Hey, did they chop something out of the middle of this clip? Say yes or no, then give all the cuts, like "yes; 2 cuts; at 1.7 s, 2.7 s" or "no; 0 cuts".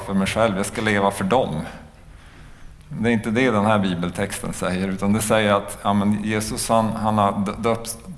no; 0 cuts